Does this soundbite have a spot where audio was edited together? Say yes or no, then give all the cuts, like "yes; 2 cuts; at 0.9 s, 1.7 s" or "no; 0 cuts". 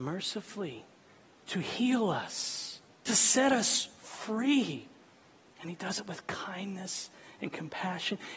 no; 0 cuts